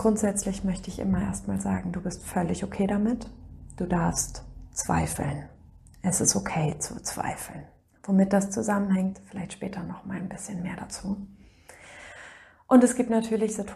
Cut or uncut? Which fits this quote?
uncut